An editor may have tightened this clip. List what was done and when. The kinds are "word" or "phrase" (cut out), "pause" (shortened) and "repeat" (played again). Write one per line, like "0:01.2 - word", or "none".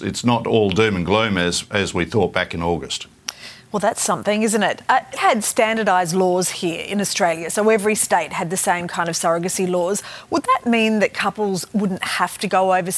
0:05.2 - phrase